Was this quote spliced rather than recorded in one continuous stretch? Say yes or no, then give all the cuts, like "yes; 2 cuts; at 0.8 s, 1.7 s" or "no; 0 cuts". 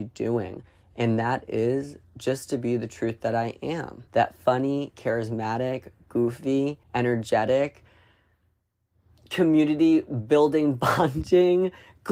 yes; 2 cuts; at 4.1 s, 6.8 s